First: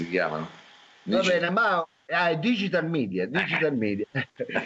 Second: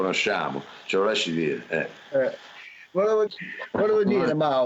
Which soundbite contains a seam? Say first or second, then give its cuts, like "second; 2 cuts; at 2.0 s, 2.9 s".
second; 1 cut; at 3.3 s